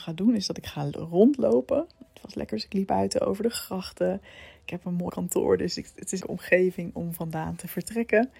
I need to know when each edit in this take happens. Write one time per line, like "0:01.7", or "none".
0:02.5
0:02.9
0:05.1
0:06.2